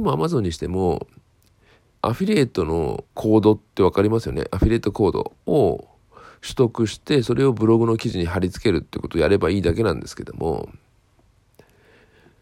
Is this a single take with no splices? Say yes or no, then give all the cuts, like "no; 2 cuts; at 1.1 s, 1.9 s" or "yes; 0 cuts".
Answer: no; 4 cuts; at 1.9 s, 3.1 s, 3.7 s, 5.4 s